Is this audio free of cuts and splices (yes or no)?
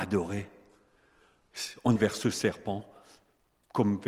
no